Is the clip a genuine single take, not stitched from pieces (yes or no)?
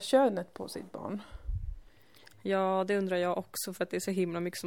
yes